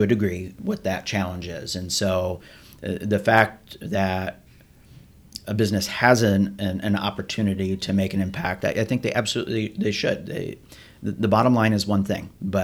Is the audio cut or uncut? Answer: uncut